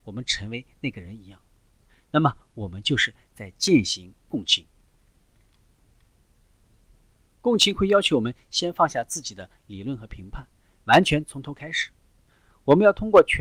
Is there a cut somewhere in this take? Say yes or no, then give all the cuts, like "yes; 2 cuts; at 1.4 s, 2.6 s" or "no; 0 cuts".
no; 0 cuts